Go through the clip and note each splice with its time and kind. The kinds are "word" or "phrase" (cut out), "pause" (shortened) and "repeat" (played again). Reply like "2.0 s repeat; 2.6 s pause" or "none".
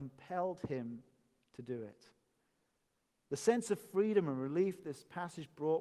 none